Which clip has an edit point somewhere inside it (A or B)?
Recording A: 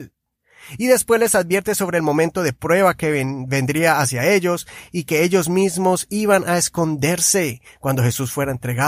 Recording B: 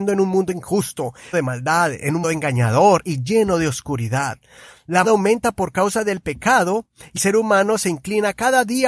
B